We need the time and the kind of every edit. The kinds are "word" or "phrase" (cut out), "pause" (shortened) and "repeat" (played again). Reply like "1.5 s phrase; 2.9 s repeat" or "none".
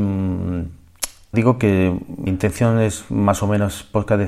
1.3 s word; 2.3 s word